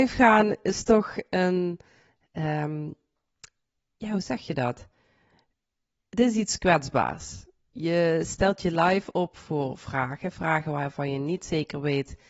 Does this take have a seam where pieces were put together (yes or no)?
no